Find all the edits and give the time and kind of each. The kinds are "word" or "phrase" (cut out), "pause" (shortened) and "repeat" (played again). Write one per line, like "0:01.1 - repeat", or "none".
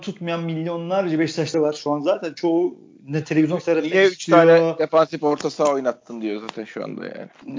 0:01.5 - word